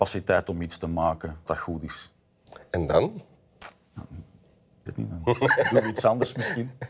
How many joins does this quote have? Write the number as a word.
two